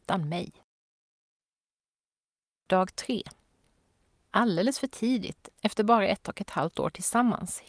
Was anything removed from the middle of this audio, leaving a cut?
no; 0 cuts

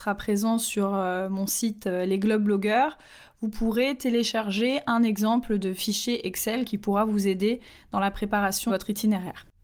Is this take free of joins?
no; 1 cut; at 8.7 s

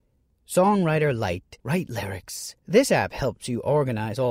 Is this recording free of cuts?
no; 2 cuts; at 1.6 s, 2.6 s

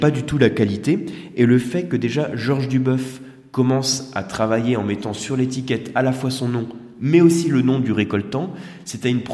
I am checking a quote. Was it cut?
no; 0 cuts

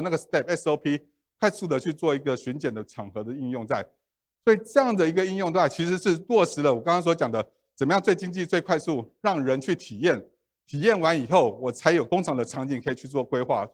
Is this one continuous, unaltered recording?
yes; 0 cuts

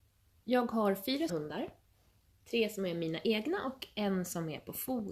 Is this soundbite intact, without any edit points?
no; 1 cut; at 1.3 s

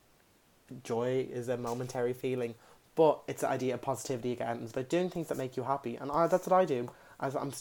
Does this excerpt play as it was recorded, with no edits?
yes; 0 cuts

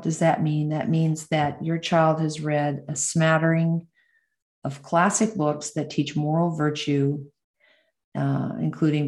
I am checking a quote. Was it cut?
no; 0 cuts

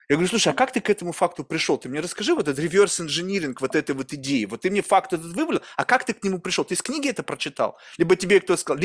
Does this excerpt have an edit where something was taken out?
no; 0 cuts

